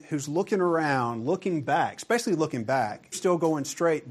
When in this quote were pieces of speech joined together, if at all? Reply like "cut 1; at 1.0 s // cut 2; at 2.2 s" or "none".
cut 1; at 3.1 s